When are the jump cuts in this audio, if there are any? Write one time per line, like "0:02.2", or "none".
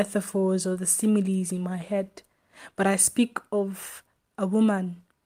none